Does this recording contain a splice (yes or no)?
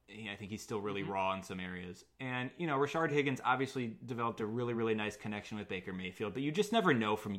no